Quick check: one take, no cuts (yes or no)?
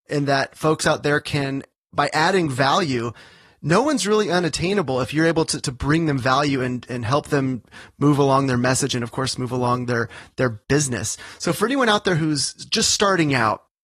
yes